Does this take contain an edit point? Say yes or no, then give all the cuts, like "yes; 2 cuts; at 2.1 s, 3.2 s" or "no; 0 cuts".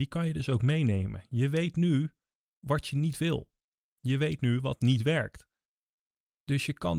no; 0 cuts